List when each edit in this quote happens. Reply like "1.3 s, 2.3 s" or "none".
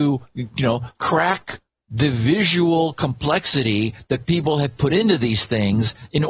0.9 s

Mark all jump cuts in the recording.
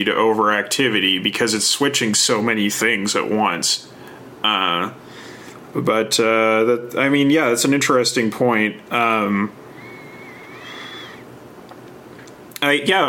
none

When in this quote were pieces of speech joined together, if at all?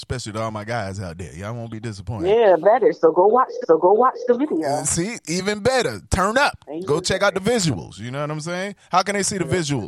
2.6 s, 3.6 s

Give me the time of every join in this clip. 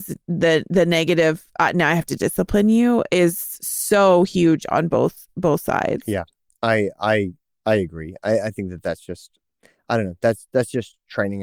none

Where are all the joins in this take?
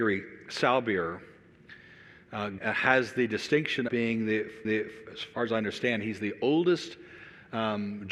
2.6 s, 3.9 s, 4.6 s

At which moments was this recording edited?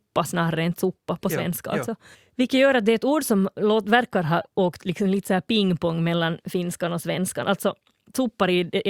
2.1 s

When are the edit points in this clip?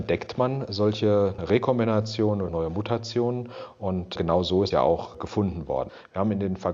1.4 s, 2.5 s, 4.2 s, 4.7 s

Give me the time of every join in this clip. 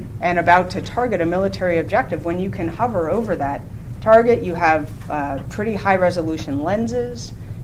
none

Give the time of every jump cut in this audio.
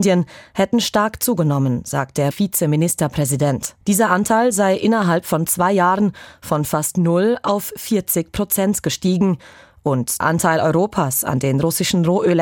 2.3 s, 3.8 s, 10.2 s

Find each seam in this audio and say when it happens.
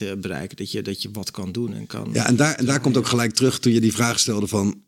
none

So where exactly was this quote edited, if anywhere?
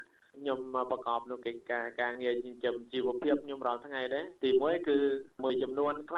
none

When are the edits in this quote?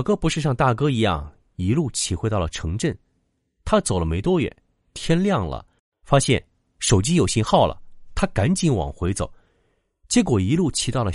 none

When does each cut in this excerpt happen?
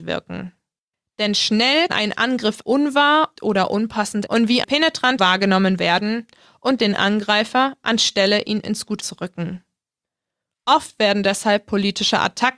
1.9 s, 2.6 s, 3.4 s, 4.3 s, 4.6 s, 5.2 s, 6.8 s, 8.6 s, 9.0 s

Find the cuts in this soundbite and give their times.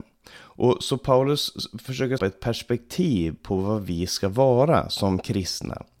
2.2 s

